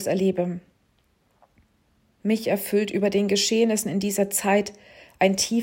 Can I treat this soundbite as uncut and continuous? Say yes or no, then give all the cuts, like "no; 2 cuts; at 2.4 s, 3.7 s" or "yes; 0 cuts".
yes; 0 cuts